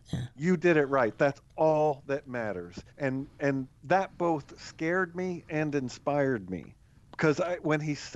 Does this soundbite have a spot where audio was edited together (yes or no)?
yes